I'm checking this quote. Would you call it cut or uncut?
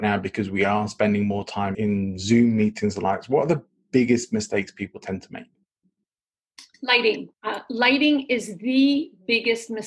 cut